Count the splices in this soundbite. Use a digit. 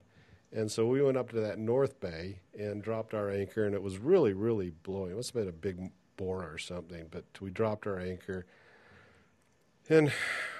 1